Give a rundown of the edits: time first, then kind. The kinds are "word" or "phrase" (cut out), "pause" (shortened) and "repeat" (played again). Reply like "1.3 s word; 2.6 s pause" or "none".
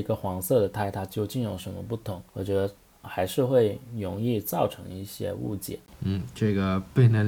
2.3 s pause